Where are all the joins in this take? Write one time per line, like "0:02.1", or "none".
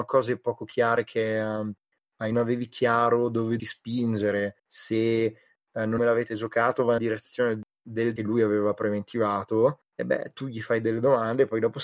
0:02.3
0:03.6
0:04.6
0:06.0
0:07.0
0:08.2
0:09.9